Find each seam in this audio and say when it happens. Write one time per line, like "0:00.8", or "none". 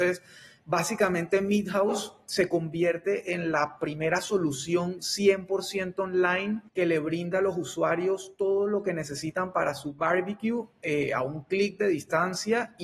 0:06.7